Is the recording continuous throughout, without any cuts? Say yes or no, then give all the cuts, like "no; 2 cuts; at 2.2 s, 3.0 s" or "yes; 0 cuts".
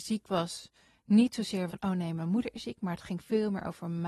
no; 1 cut; at 1.7 s